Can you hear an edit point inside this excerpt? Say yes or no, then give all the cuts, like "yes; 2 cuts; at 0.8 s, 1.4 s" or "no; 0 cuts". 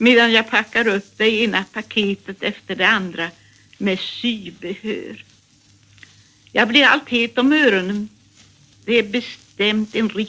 no; 0 cuts